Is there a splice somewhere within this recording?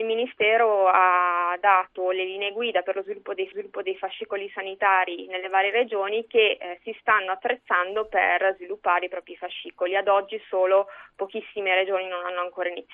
yes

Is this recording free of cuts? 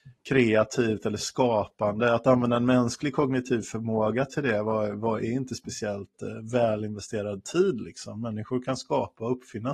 yes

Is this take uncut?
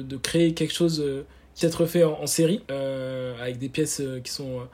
no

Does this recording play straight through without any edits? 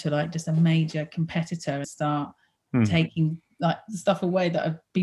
no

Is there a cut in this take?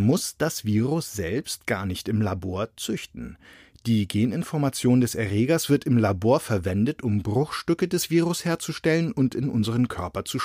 no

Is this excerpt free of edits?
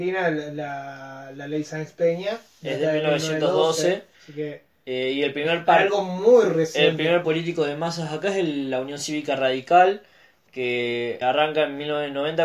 no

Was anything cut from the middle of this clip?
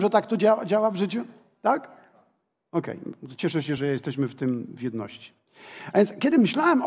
no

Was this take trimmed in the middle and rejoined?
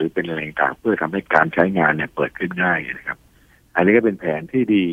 no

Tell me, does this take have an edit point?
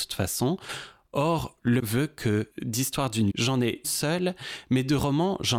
yes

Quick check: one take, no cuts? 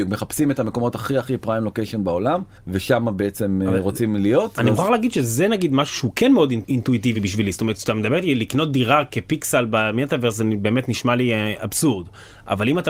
yes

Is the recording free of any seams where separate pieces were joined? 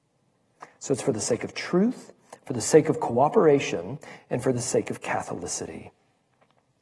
yes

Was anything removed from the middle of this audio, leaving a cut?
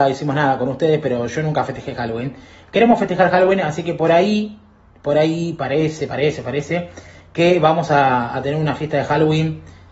no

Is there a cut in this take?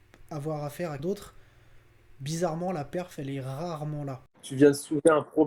yes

